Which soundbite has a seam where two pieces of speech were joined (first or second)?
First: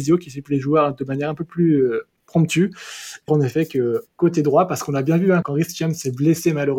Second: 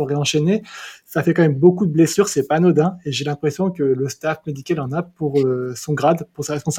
first